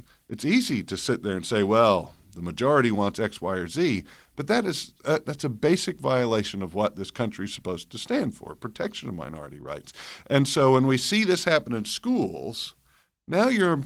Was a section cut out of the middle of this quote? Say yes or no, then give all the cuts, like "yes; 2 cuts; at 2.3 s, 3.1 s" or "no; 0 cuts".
no; 0 cuts